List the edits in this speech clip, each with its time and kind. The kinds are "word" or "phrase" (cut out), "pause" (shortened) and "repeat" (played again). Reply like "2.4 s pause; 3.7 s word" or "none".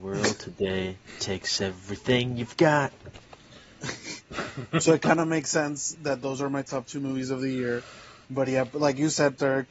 none